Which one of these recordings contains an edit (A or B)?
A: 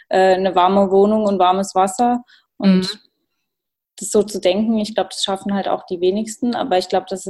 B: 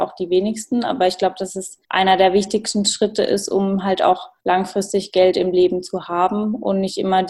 B